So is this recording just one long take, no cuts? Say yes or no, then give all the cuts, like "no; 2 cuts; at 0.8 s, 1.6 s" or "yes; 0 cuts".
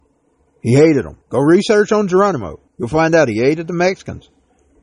no; 2 cuts; at 1.2 s, 2.7 s